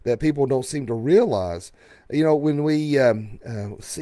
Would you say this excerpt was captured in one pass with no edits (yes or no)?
yes